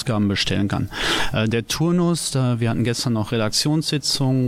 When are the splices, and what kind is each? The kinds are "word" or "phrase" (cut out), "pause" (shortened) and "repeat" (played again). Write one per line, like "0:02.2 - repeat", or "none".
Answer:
none